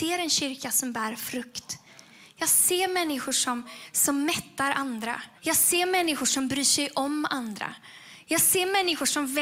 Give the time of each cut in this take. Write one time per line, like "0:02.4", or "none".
0:05.4